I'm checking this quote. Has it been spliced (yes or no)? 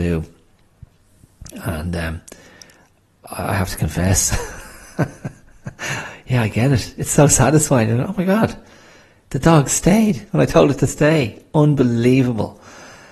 no